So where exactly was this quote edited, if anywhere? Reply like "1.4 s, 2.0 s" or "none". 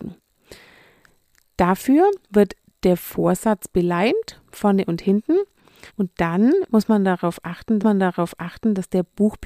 2.2 s, 5.9 s, 7.8 s